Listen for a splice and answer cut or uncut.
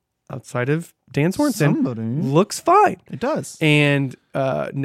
uncut